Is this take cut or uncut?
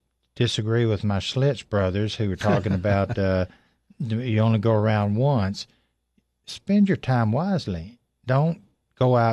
uncut